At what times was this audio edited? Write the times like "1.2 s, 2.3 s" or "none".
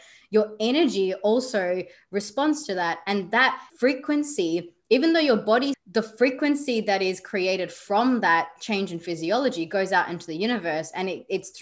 3.7 s, 5.7 s